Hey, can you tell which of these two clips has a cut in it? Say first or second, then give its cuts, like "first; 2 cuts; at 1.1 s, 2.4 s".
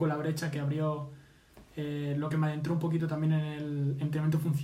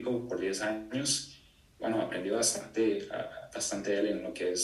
second; 1 cut; at 1.8 s